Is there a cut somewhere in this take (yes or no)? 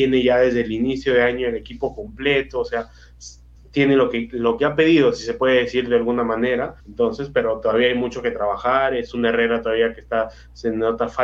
yes